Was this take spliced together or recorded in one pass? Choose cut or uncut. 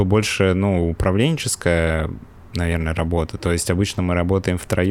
uncut